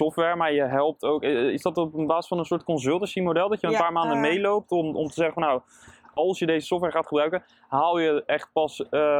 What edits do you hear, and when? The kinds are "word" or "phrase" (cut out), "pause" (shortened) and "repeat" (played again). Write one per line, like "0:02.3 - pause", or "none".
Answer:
none